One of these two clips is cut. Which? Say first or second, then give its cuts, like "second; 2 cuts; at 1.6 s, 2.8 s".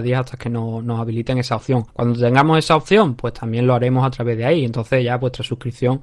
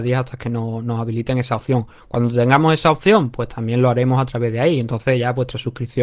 first; 1 cut; at 1.9 s